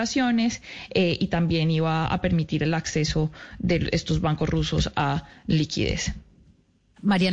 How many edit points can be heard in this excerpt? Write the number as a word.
zero